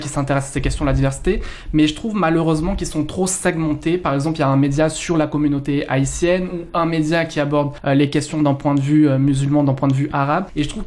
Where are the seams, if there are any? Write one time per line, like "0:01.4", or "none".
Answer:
none